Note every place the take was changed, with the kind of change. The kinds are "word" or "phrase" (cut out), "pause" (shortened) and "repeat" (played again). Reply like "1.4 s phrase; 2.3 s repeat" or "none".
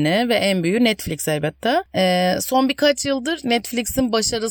none